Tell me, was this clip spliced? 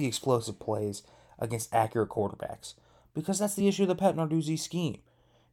no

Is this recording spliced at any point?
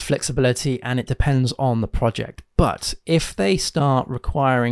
no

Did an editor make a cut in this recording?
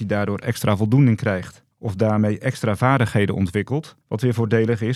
yes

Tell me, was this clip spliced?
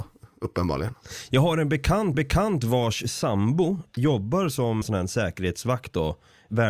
yes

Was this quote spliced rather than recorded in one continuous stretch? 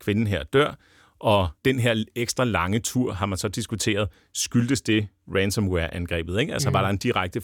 yes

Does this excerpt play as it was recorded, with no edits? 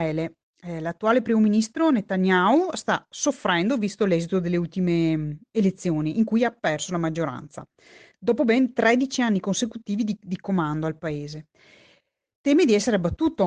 yes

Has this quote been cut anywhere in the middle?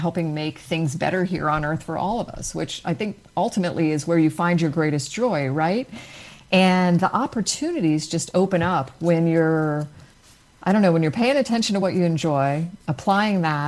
no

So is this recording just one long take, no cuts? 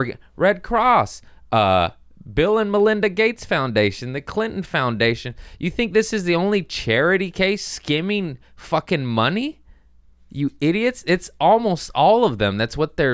yes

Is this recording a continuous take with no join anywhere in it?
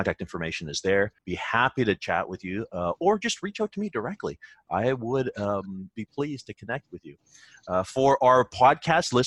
no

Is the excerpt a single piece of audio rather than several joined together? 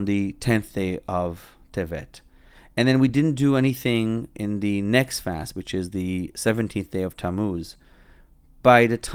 yes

